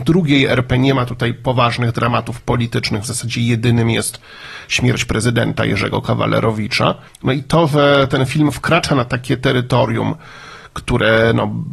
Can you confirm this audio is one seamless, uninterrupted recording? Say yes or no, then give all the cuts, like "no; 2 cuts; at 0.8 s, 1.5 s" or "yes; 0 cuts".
no; 1 cut; at 7.1 s